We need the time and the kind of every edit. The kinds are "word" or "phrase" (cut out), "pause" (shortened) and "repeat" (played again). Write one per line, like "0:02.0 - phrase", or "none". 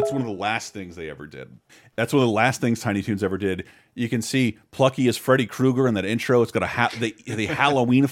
none

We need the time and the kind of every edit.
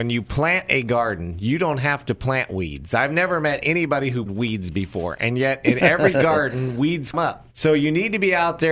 0:04.3 - word
0:07.1 - word
0:07.5 - pause

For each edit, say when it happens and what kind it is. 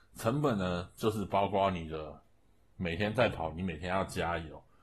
none

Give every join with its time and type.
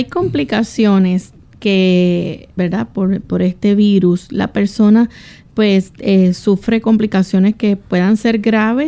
0:02.6 - word

